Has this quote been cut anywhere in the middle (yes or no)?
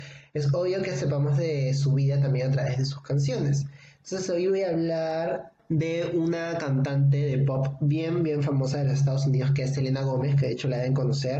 no